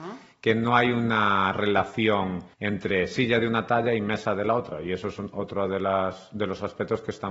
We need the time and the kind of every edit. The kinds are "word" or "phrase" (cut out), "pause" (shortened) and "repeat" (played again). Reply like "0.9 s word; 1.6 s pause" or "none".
2.5 s pause